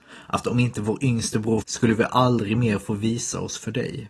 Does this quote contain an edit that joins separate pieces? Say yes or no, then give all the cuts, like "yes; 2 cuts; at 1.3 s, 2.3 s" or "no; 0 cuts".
yes; 1 cut; at 1.6 s